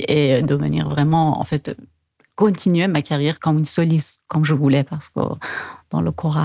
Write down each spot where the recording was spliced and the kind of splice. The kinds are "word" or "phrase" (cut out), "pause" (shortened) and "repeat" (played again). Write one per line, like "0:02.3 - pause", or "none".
none